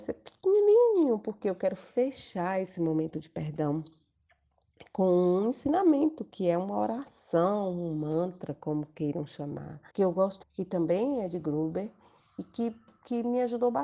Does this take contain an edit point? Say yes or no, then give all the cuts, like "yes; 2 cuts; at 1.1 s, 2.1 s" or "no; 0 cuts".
yes; 2 cuts; at 9.9 s, 10.4 s